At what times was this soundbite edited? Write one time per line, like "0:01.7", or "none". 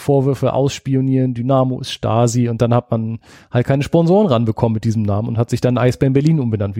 none